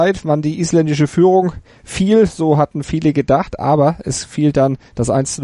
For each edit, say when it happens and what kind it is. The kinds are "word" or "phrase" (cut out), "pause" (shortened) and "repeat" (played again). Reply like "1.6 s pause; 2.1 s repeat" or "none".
none